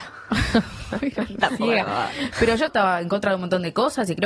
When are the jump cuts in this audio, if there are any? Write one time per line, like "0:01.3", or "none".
0:02.7